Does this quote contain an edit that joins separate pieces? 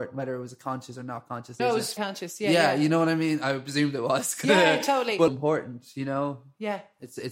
yes; 3 cuts; at 1.6 s, 2.0 s, 5.3 s

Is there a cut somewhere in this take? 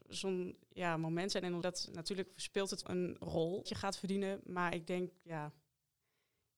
yes; 3 cuts; at 1.6 s, 2.8 s, 3.7 s

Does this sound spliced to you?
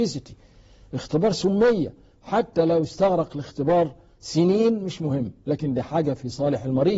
no; 0 cuts

